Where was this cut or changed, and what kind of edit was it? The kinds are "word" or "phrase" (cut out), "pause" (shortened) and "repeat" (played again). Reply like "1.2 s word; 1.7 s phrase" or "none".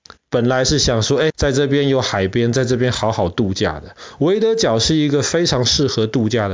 1.3 s word